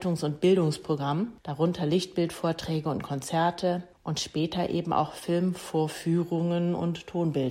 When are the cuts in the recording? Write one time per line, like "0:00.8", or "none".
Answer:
none